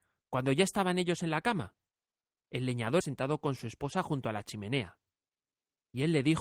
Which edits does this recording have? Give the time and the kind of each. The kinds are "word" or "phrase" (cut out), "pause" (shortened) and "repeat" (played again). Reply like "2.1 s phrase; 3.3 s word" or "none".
3.0 s word